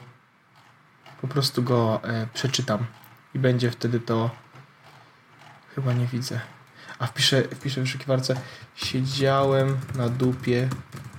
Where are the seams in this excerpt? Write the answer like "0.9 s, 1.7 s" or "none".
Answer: none